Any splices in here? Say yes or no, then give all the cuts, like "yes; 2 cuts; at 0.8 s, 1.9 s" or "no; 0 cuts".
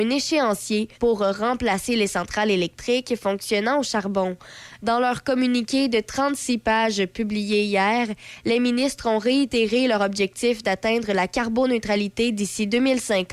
yes; 1 cut; at 0.9 s